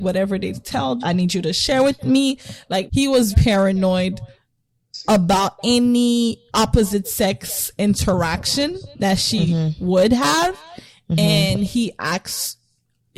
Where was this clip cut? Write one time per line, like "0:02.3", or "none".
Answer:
0:01.0
0:02.9
0:03.3
0:06.5

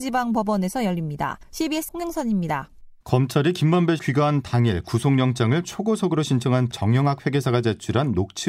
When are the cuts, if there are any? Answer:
0:01.9
0:03.0
0:04.0
0:06.7

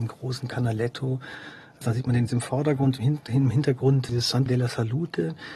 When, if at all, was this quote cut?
0:02.3
0:04.1
0:04.5

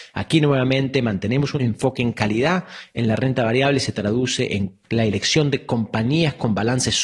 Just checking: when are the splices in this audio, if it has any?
0:04.8

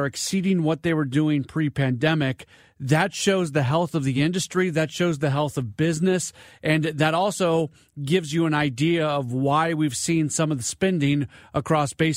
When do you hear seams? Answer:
none

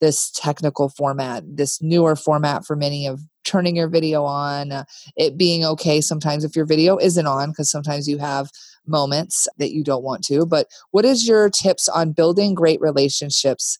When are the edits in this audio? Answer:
none

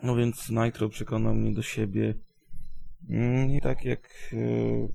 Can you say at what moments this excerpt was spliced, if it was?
0:03.6

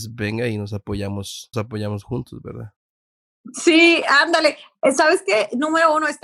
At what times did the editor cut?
0:01.5

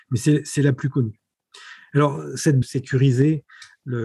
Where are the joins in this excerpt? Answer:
0:02.6

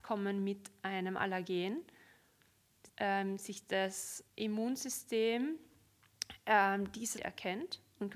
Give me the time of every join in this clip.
0:02.9
0:04.3
0:07.2

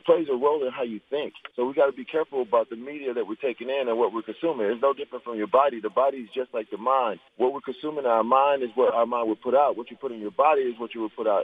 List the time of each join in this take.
0:01.5
0:07.3

